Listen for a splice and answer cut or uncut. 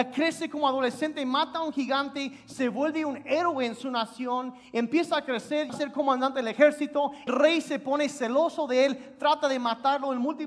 cut